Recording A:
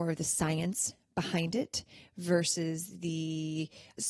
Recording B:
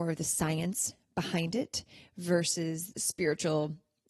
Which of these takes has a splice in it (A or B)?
B